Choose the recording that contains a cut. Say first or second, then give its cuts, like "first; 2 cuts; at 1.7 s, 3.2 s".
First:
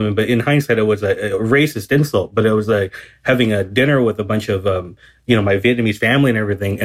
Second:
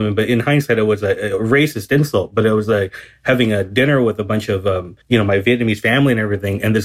second; 1 cut; at 5.0 s